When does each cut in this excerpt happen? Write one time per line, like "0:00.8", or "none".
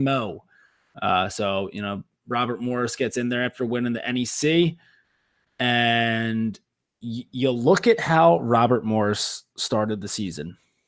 none